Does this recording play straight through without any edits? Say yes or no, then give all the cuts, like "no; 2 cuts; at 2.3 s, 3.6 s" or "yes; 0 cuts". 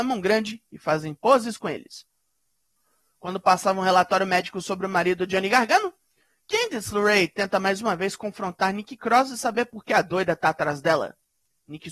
yes; 0 cuts